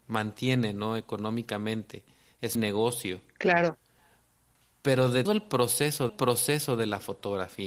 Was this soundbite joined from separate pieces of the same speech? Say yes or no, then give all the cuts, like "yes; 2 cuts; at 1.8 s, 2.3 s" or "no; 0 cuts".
yes; 3 cuts; at 2.5 s, 5.2 s, 6.1 s